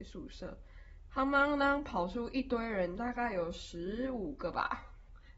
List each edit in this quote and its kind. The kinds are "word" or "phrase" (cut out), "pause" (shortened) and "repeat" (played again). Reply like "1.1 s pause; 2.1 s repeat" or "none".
1.1 s phrase